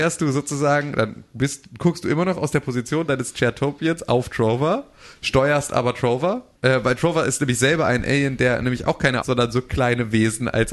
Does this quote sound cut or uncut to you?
cut